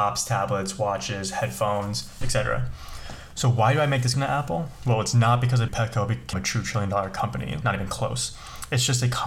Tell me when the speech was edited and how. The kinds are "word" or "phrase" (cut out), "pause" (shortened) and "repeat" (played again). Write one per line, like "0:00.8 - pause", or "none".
0:02.2 - word
0:04.1 - word
0:05.7 - word
0:06.3 - word
0:07.6 - word